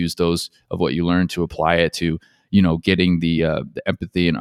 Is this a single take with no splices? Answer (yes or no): yes